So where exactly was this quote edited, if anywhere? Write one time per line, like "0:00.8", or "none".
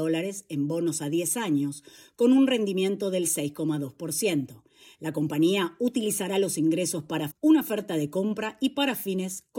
0:07.3